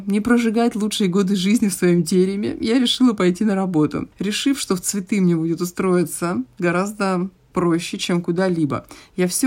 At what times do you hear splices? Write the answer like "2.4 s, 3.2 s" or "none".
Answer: 4.1 s